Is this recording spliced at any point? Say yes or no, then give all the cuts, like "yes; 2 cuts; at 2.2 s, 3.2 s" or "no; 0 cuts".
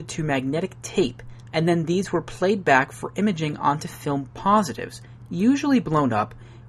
no; 0 cuts